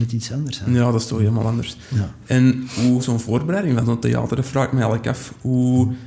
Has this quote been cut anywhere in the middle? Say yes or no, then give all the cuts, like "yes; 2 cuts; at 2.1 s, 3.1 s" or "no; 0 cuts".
yes; 1 cut; at 3.0 s